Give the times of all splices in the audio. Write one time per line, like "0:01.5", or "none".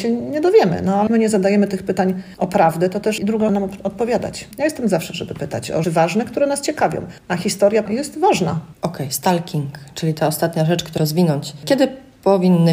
0:01.1
0:03.2
0:03.5
0:05.8
0:07.2
0:07.9
0:11.0